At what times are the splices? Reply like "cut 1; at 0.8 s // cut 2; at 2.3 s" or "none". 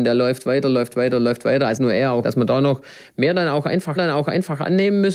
cut 1; at 1.8 s // cut 2; at 2.2 s // cut 3; at 4.0 s